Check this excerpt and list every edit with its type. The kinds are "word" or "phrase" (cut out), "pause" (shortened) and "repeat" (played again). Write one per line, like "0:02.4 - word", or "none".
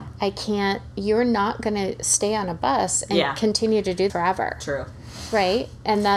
0:04.1 - word